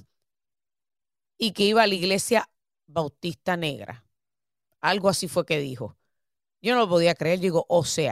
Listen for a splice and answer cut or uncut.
uncut